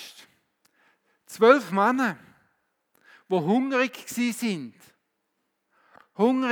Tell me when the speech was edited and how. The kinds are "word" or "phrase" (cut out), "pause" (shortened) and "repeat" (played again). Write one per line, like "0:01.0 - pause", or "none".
none

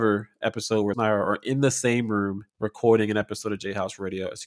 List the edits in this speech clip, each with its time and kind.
0:00.9 - word
0:02.5 - pause

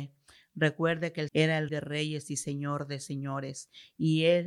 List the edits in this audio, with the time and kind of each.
0:01.3 - word
0:01.7 - word

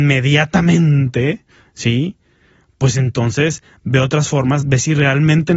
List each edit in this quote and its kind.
none

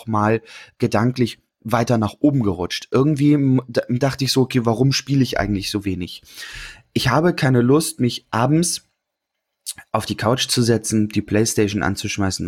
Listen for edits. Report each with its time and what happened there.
none

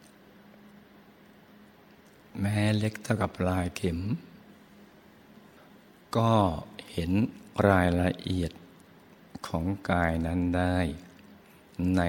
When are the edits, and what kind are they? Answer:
none

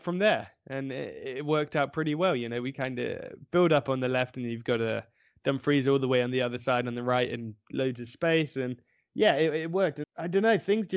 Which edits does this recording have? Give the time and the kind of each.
0:10.0 - word

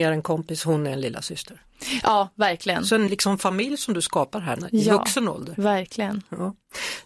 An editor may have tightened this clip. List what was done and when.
0:03.1 - word

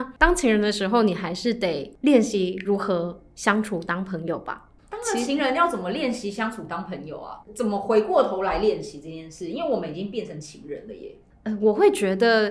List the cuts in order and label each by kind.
0:07.4 - pause

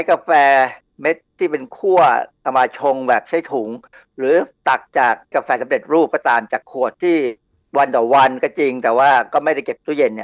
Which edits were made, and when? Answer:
none

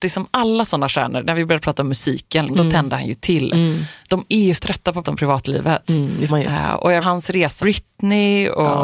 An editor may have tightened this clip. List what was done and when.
0:02.5 - word
0:04.6 - word
0:05.0 - word
0:06.3 - word
0:07.0 - word
0:07.6 - word

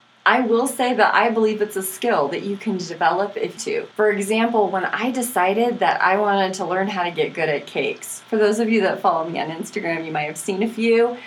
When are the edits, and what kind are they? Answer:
0:03.6 - phrase
0:03.9 - pause

